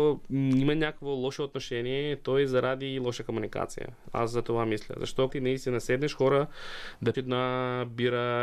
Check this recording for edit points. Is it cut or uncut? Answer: cut